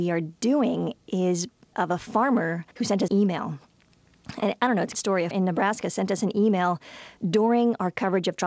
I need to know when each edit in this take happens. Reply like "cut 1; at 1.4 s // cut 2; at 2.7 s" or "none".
cut 1; at 1.7 s // cut 2; at 2.7 s // cut 3; at 3.1 s // cut 4; at 4.9 s // cut 5; at 5.3 s